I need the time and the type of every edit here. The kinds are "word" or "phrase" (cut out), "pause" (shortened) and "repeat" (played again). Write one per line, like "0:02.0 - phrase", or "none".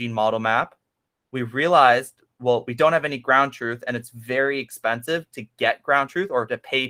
none